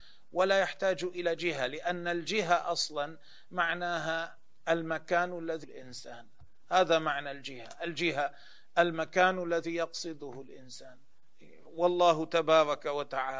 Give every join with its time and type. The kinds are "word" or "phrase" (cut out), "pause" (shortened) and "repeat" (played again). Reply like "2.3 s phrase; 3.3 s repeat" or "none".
5.6 s word